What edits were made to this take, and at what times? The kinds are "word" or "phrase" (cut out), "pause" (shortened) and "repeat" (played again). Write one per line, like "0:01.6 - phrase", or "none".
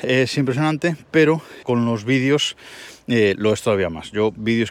0:01.6 - word